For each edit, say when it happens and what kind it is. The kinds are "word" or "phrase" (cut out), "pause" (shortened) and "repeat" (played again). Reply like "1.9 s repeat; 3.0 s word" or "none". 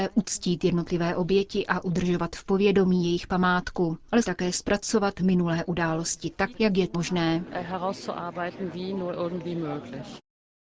4.2 s word; 6.5 s word; 6.9 s word